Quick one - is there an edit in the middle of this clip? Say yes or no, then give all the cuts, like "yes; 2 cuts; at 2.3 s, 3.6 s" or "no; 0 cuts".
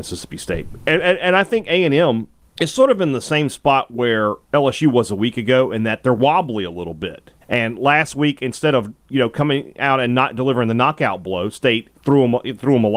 yes; 3 cuts; at 2.4 s, 7.4 s, 12.0 s